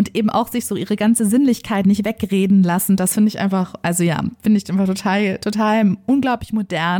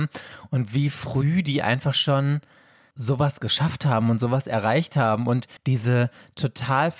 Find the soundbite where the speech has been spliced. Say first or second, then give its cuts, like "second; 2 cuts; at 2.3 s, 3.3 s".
second; 1 cut; at 5.6 s